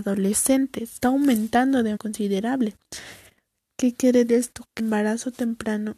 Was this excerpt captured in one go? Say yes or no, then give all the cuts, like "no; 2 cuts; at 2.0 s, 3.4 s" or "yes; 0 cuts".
no; 4 cuts; at 1.0 s, 2.0 s, 4.3 s, 4.8 s